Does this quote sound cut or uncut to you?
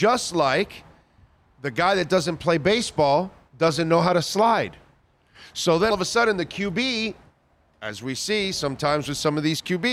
cut